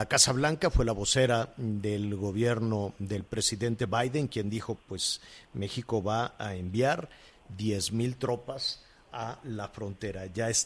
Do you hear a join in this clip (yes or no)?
yes